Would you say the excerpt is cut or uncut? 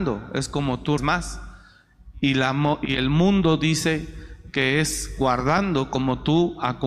cut